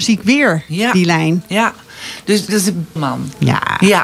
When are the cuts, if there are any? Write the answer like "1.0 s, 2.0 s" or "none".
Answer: 2.5 s, 3.0 s